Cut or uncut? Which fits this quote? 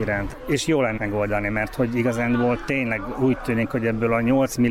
cut